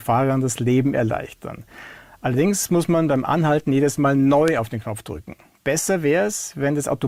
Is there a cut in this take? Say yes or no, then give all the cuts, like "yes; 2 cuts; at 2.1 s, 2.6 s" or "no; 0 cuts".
no; 0 cuts